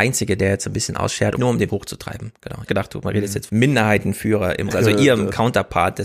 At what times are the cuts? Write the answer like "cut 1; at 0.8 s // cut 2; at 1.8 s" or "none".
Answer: cut 1; at 1.3 s // cut 2; at 1.7 s // cut 3; at 2.7 s // cut 4; at 3.5 s // cut 5; at 4.7 s